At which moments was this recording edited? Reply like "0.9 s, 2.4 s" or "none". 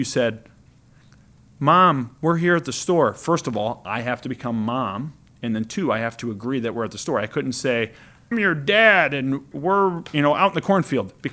8.3 s, 9.5 s